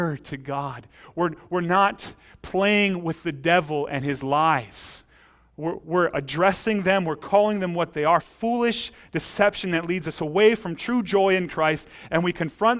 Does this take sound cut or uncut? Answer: uncut